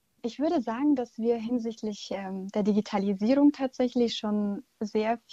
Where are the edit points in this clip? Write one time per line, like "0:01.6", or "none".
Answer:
none